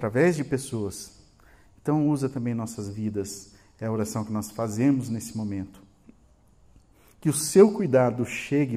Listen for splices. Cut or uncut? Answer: uncut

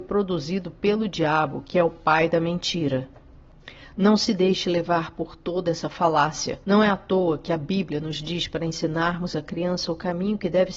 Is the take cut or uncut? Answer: cut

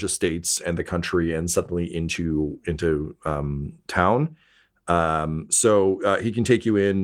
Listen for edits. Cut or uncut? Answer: uncut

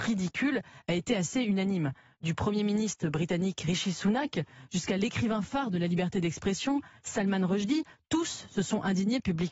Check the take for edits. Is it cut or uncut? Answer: uncut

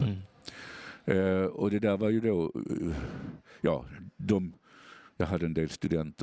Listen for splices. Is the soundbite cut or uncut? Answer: uncut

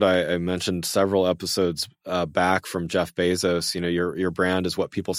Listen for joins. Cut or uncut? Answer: uncut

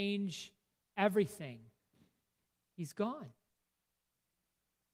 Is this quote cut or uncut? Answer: uncut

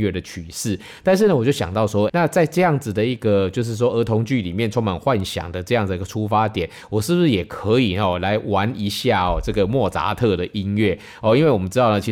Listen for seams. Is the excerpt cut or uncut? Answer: cut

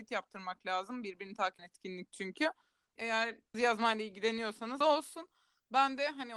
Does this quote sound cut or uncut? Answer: cut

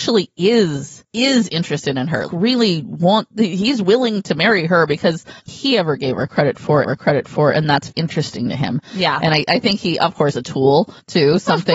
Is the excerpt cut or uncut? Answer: cut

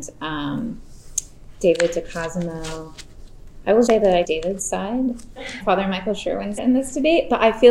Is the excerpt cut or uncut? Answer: cut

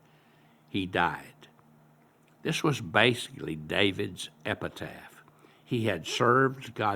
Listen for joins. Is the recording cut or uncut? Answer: uncut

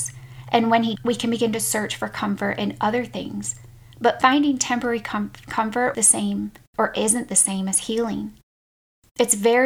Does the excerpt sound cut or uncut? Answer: cut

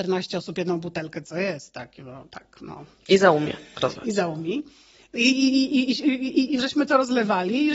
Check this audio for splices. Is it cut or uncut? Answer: uncut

